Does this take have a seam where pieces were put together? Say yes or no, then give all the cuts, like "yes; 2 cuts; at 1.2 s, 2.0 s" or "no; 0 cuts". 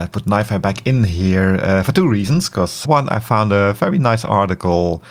yes; 1 cut; at 2.8 s